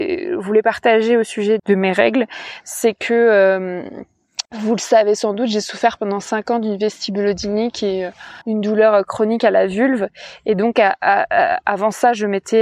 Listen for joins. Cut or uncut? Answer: cut